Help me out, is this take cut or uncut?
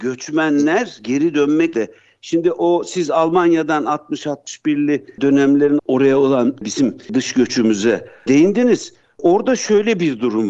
cut